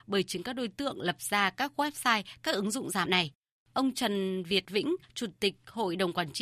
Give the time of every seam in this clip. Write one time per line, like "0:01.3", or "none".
0:03.1